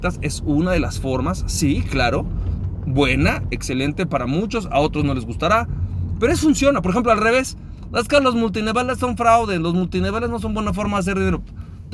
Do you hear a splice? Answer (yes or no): no